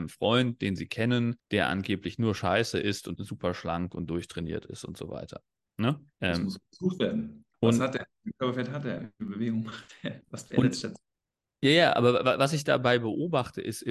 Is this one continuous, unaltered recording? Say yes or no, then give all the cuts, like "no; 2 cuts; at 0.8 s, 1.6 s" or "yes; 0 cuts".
no; 3 cuts; at 3.2 s, 6.1 s, 7.5 s